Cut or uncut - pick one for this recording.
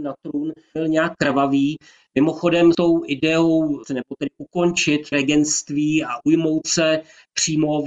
cut